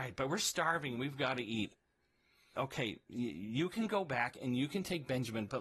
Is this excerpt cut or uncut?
uncut